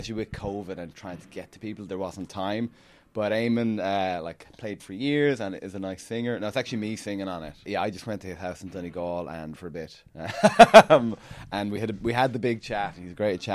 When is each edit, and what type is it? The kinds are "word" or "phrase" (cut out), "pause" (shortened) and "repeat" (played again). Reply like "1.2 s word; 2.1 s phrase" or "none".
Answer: 4.8 s word; 9.6 s phrase